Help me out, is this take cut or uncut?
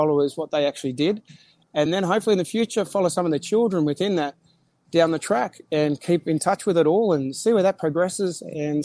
uncut